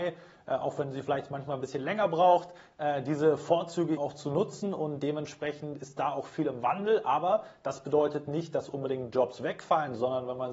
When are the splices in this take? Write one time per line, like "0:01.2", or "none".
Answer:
0:04.0